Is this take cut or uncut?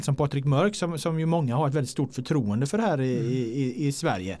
uncut